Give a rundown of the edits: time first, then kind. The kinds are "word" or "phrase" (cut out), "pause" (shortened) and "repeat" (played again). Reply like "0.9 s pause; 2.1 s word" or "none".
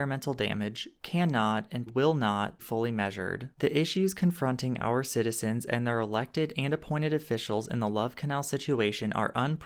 1.9 s word; 2.6 s word